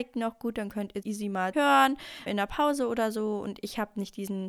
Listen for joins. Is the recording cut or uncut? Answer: cut